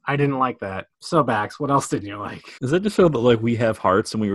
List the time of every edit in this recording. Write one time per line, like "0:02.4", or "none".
0:00.9
0:02.6